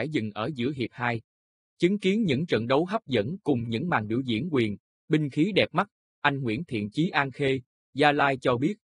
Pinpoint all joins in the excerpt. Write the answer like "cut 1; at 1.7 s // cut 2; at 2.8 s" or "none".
none